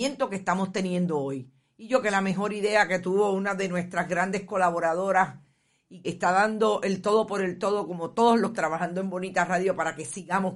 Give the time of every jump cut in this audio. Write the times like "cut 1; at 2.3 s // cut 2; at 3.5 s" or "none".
cut 1; at 2.0 s // cut 2; at 6.0 s // cut 3; at 8.5 s